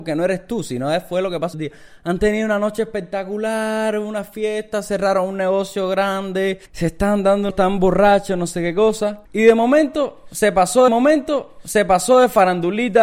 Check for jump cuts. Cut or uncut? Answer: cut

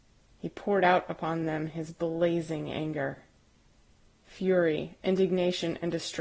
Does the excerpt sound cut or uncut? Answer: uncut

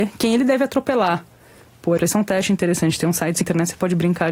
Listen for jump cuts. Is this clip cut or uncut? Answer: cut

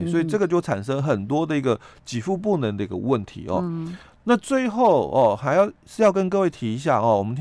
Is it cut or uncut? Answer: uncut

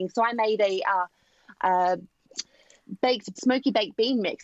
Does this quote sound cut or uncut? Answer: cut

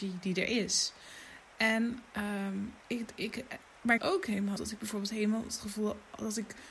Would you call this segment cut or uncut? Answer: cut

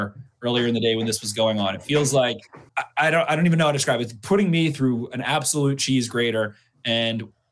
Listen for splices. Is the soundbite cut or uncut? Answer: cut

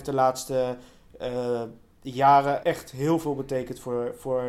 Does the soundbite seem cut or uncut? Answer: cut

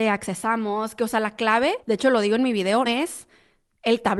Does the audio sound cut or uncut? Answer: cut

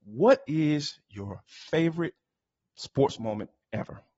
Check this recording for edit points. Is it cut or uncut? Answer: uncut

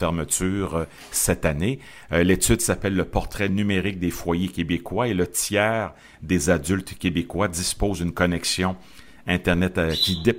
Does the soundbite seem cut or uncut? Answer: uncut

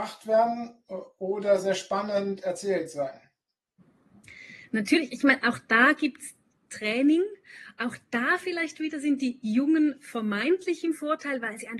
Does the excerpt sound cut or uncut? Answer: uncut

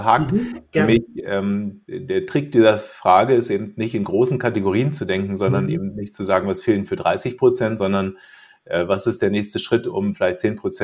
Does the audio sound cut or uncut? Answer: uncut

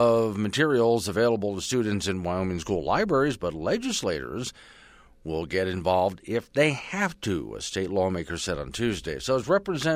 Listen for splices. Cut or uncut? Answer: uncut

